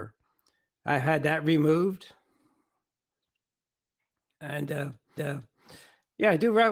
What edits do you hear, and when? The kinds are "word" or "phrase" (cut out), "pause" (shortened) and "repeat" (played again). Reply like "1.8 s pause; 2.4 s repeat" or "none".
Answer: 5.2 s repeat